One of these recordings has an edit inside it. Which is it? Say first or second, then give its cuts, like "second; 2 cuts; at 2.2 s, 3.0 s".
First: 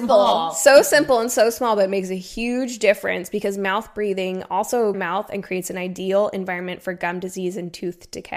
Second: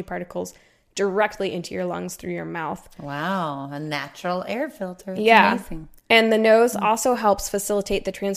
first; 1 cut; at 4.9 s